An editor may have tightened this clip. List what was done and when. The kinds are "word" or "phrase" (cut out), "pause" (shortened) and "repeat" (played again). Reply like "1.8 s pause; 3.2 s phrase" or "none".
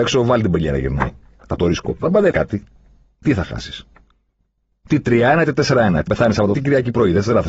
1.6 s word; 2.3 s word; 6.1 s word; 6.5 s word